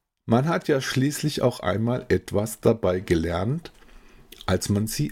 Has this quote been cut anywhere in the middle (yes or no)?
no